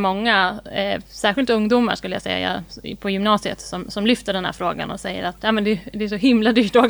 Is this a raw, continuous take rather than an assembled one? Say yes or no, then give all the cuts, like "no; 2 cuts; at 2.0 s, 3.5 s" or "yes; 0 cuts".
yes; 0 cuts